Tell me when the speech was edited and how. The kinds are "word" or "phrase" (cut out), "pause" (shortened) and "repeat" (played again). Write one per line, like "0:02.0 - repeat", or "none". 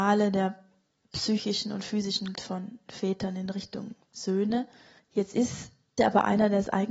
0:02.3 - word
0:05.0 - pause
0:06.0 - word